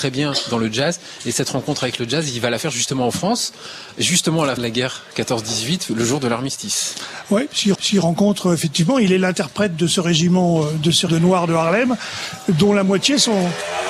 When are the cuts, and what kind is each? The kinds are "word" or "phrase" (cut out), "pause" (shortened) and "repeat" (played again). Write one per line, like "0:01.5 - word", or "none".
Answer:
0:04.6 - word
0:07.7 - repeat
0:11.1 - word